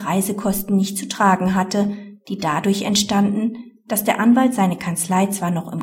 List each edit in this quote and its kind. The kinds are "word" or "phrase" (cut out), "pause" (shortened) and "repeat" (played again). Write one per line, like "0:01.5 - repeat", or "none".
none